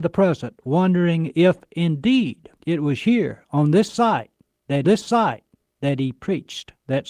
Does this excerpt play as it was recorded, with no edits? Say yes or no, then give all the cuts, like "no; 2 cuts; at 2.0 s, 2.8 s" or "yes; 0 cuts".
no; 2 cuts; at 2.6 s, 4.8 s